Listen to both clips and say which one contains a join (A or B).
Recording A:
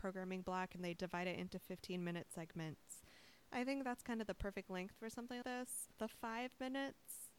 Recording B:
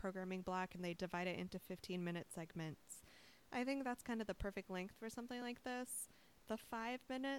A